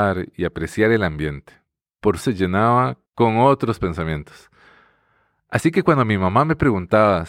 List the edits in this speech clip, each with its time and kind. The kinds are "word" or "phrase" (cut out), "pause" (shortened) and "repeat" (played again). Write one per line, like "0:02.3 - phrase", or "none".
0:02.2 - phrase
0:03.1 - pause